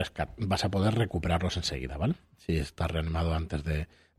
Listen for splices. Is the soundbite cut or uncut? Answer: uncut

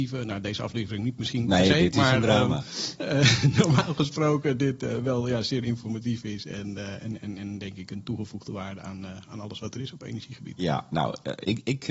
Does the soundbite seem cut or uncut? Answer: uncut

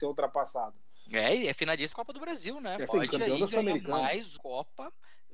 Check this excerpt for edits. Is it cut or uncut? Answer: cut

